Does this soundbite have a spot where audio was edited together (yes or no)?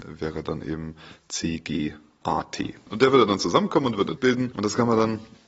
yes